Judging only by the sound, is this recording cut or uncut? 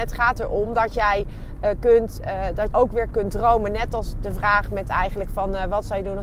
cut